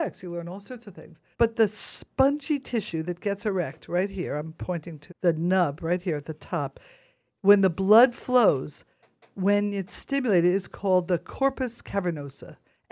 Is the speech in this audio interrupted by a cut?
yes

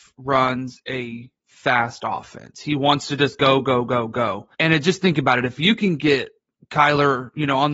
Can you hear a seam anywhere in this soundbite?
yes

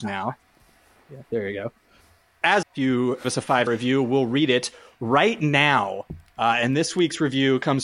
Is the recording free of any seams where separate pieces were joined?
no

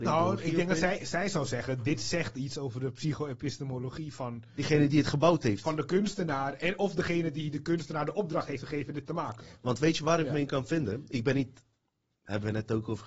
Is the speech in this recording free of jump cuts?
yes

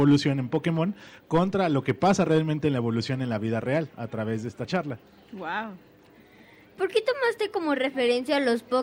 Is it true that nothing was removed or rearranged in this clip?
yes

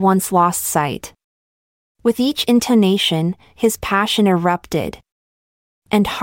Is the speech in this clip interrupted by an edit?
no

